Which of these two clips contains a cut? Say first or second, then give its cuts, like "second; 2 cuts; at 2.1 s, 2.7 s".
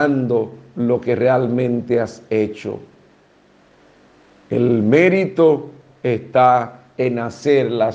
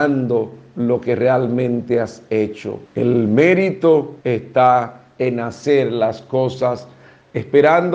second; 2 cuts; at 2.9 s, 4.2 s